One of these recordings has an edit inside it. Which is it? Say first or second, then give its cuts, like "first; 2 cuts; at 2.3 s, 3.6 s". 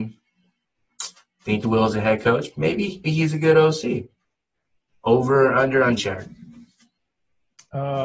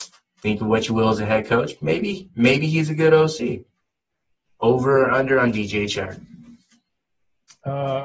first; 3 cuts; at 1.6 s, 3.0 s, 6.0 s